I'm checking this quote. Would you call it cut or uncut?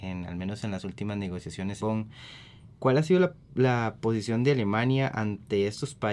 cut